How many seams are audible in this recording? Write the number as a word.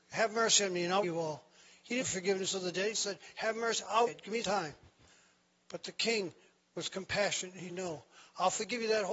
six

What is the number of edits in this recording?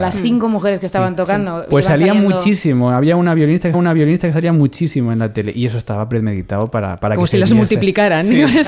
one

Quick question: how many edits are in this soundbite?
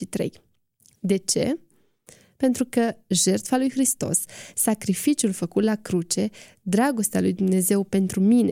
zero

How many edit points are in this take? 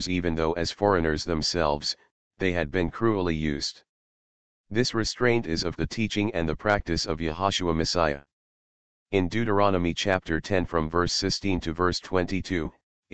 one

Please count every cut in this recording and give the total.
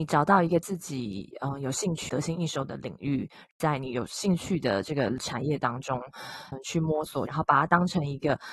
two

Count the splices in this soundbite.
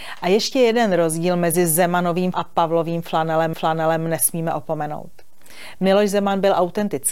two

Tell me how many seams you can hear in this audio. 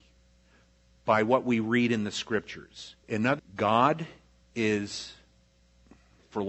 two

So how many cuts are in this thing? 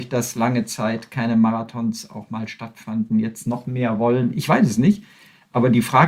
zero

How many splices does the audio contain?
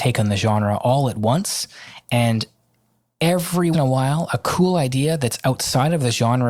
one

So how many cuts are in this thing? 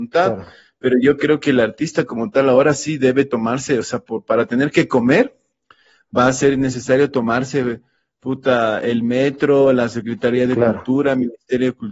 zero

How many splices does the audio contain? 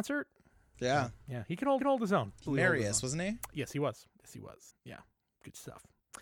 four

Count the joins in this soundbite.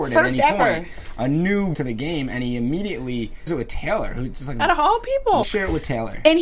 three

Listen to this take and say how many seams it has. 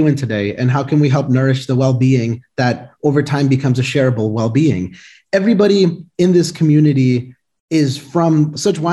zero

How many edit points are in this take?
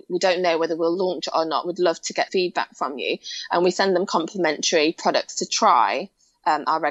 one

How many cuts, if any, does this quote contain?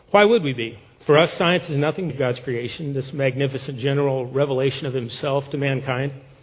two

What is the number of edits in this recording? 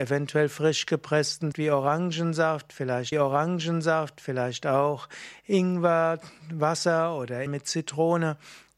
three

